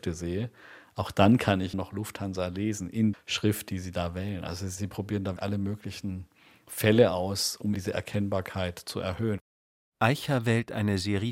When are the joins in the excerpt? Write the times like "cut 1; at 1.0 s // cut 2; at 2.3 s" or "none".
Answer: cut 1; at 1.7 s // cut 2; at 3.1 s // cut 3; at 5.4 s // cut 4; at 7.7 s